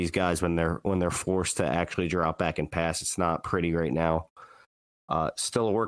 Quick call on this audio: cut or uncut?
uncut